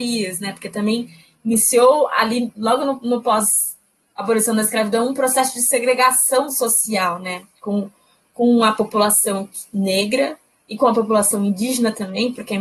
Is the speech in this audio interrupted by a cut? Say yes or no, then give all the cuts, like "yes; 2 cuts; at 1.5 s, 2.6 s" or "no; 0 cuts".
no; 0 cuts